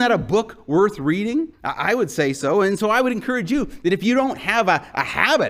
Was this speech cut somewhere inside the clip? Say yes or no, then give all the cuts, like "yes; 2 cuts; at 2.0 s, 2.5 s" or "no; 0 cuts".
yes; 1 cut; at 1.5 s